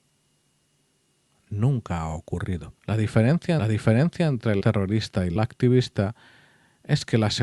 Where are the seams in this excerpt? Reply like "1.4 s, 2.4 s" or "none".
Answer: 2.8 s, 3.6 s, 4.6 s, 5.4 s